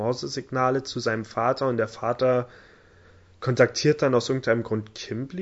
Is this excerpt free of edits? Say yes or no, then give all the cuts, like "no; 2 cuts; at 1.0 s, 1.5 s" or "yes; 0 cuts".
yes; 0 cuts